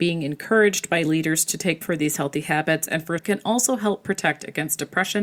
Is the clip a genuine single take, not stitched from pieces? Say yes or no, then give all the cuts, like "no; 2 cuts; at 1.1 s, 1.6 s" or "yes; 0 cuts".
no; 2 cuts; at 1.8 s, 3.2 s